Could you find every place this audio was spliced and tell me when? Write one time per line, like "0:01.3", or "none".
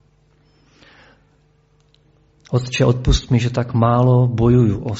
none